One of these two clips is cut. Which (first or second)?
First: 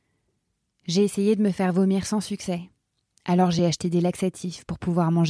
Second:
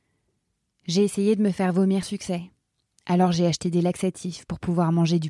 second